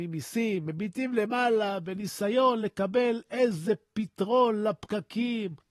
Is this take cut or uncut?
uncut